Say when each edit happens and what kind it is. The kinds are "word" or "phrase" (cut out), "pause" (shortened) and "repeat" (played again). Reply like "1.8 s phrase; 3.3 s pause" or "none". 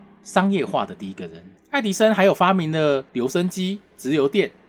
1.6 s pause; 3.1 s pause